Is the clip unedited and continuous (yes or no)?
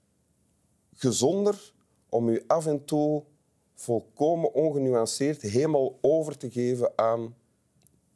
yes